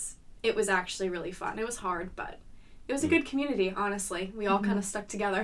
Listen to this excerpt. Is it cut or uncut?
uncut